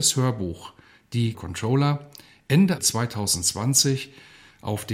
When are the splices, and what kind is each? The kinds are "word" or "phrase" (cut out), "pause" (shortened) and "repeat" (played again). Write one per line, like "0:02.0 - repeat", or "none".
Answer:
0:01.3 - phrase
0:02.8 - word